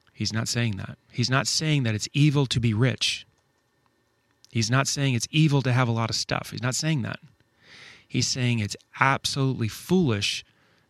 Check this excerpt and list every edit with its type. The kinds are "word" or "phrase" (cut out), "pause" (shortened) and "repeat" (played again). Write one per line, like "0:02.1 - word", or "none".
none